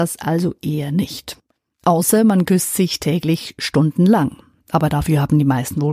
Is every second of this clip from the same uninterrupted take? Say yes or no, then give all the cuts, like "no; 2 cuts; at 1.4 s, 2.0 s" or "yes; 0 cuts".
yes; 0 cuts